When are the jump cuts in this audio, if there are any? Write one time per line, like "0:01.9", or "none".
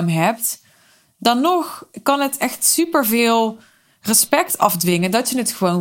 none